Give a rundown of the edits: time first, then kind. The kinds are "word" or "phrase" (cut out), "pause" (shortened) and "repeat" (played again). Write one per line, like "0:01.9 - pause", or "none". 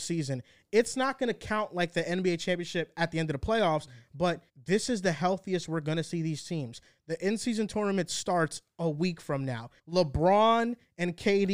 0:04.5 - pause
0:09.8 - pause

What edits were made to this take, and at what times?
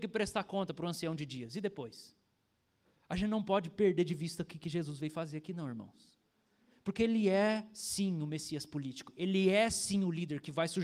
none

